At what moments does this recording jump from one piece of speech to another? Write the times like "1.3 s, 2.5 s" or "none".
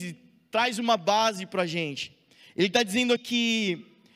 3.2 s

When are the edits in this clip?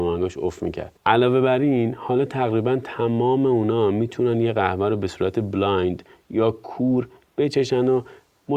1.0 s

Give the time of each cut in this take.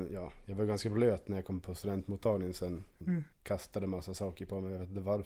3.0 s, 3.3 s

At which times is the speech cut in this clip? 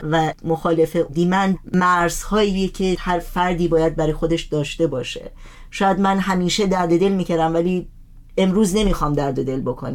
3.0 s

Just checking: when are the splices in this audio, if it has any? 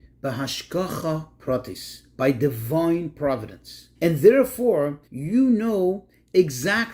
3.9 s, 5.0 s

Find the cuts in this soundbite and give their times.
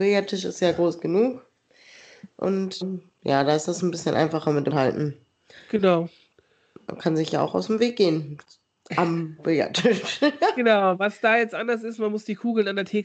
2.8 s, 4.7 s

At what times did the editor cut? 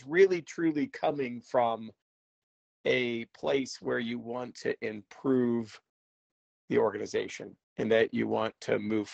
none

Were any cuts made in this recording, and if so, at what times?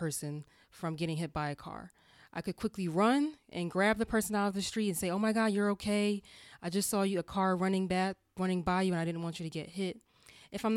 none

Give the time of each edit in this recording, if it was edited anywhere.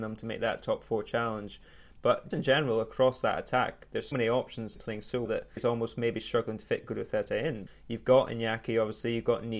2.3 s, 4.1 s, 4.8 s, 5.3 s, 5.6 s, 7.7 s

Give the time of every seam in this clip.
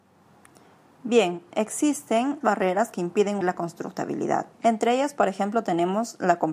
2.4 s, 3.4 s, 4.5 s

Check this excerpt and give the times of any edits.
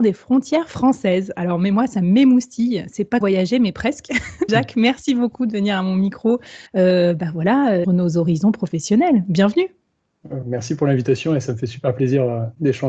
3.2 s, 4.5 s, 6.7 s, 7.8 s

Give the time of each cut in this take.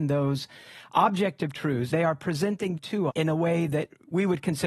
1.9 s, 2.8 s, 3.1 s

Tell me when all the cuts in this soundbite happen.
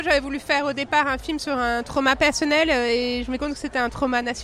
3.4 s

